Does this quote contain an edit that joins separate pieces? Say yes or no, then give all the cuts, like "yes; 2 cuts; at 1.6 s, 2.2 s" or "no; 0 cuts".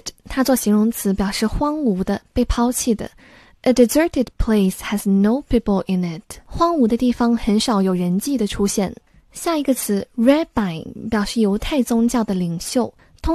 no; 0 cuts